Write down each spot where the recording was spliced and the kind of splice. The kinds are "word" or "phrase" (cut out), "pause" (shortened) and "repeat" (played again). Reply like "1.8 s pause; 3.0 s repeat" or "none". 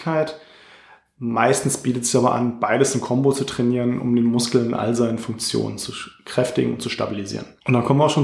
none